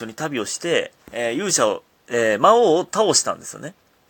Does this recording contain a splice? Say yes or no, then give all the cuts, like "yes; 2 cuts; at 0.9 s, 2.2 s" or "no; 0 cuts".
yes; 1 cut; at 1.0 s